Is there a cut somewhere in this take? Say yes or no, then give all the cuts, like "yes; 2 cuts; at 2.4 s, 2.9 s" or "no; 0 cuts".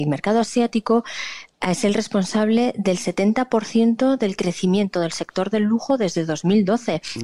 no; 0 cuts